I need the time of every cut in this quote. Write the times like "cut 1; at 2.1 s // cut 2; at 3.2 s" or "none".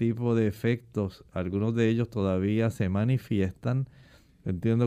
none